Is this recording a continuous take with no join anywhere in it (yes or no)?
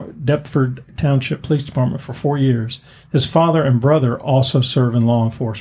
yes